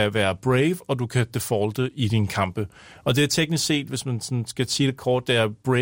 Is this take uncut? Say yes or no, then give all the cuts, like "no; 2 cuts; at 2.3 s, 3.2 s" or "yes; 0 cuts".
yes; 0 cuts